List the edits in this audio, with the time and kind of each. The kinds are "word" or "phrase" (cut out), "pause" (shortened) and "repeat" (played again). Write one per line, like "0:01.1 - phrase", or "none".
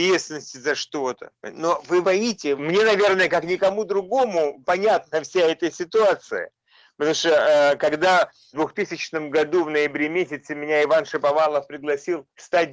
0:02.0 - word